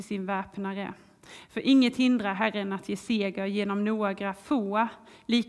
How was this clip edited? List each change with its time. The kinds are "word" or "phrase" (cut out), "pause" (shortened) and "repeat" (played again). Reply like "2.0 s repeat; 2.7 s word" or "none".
none